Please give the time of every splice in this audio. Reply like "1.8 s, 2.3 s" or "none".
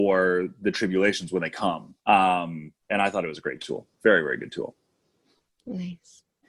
2.0 s